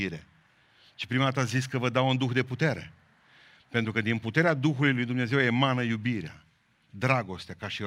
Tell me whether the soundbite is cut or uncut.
uncut